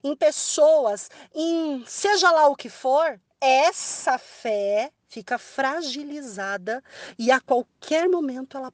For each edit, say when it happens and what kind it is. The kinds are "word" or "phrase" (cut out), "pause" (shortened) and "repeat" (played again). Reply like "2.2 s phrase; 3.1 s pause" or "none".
3.3 s pause; 5.0 s pause